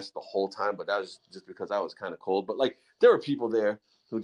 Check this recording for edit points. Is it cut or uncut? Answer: uncut